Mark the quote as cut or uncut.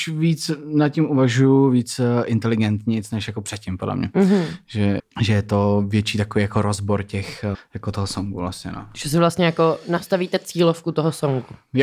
cut